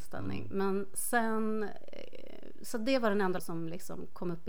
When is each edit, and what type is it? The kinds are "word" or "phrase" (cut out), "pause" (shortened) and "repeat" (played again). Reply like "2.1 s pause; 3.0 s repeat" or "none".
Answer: 3.4 s word